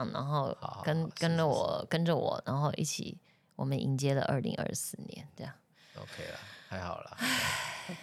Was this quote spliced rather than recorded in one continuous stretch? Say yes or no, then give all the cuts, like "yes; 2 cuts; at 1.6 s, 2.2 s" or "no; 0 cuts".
no; 0 cuts